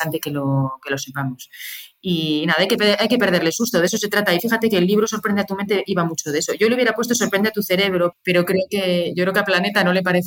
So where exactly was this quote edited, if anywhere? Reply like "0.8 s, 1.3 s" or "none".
8.1 s